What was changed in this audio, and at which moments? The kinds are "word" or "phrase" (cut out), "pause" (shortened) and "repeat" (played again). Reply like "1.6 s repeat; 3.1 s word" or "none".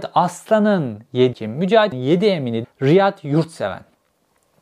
1.3 s word; 1.9 s word; 2.6 s word